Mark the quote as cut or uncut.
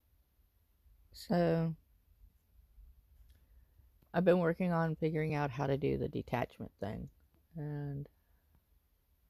uncut